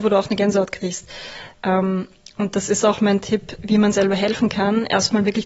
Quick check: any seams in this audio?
no; 0 cuts

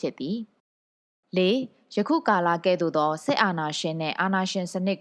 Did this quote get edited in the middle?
no; 0 cuts

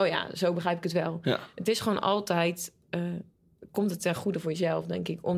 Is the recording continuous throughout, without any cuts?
yes; 0 cuts

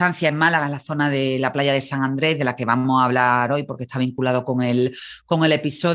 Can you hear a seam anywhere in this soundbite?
no; 0 cuts

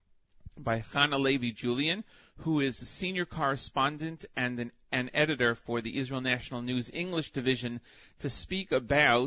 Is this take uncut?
yes; 0 cuts

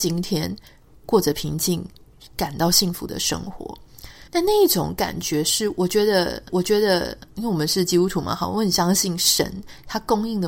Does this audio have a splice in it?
yes; 2 cuts; at 4.3 s, 6.5 s

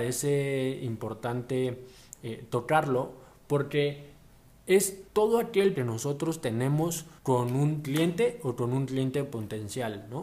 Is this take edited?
yes; 3 cuts; at 5.1 s, 5.8 s, 7.2 s

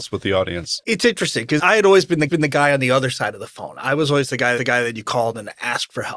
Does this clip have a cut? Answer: yes; 3 cuts; at 1.6 s, 2.3 s, 4.6 s

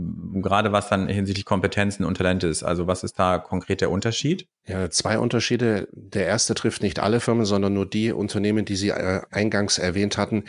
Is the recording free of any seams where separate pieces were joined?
yes; 0 cuts

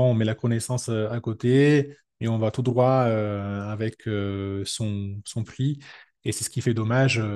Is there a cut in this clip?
yes; 1 cut; at 5.4 s

